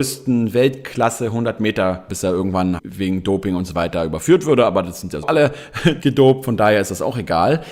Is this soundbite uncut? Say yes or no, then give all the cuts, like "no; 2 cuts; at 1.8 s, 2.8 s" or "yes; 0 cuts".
no; 4 cuts; at 2.1 s, 2.8 s, 5.2 s, 6.0 s